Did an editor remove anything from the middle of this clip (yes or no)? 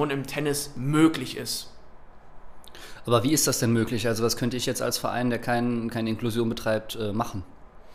no